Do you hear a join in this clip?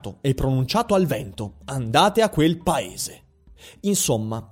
no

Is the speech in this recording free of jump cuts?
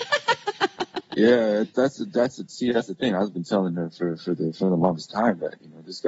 yes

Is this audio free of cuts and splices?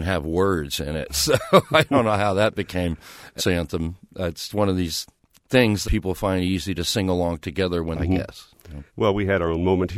no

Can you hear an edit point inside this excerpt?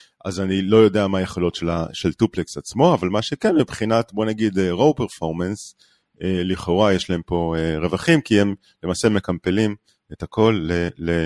no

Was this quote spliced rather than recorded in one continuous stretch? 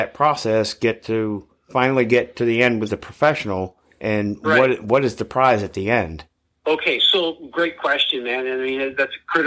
no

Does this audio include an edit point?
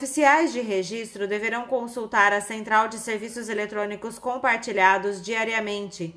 no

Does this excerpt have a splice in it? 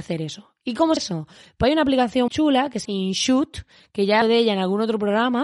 yes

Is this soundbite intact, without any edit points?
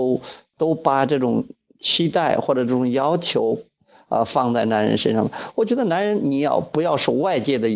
yes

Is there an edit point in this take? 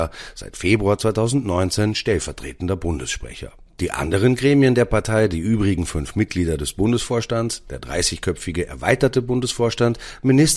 no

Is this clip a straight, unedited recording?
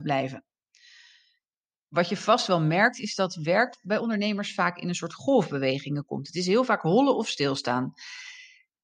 yes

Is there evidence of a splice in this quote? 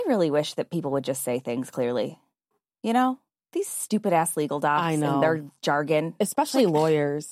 no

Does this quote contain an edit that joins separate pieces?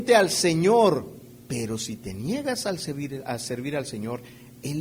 yes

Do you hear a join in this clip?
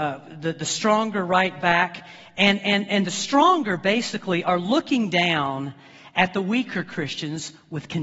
no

